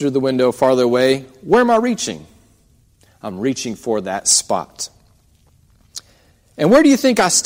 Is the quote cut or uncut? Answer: uncut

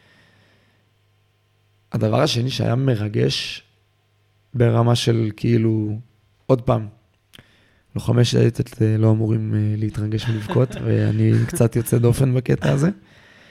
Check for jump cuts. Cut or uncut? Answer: uncut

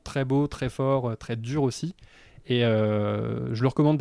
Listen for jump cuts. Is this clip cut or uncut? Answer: uncut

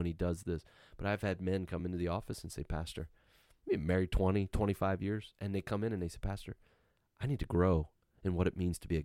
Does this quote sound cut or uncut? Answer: uncut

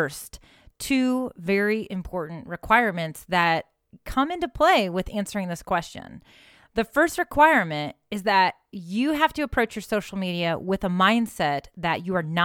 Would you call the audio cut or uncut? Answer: uncut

